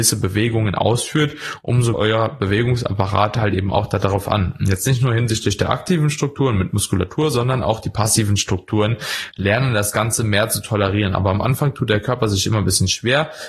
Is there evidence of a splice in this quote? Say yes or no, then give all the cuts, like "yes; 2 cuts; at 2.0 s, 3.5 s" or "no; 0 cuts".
yes; 1 cut; at 1.9 s